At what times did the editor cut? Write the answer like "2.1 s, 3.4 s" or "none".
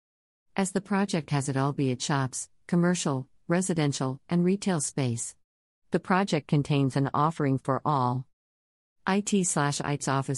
none